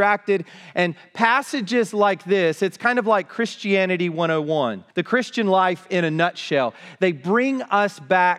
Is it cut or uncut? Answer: cut